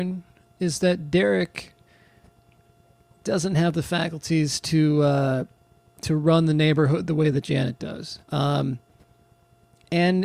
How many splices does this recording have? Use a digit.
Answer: 1